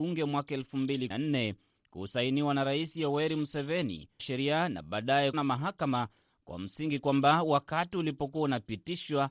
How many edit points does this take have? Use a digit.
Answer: 3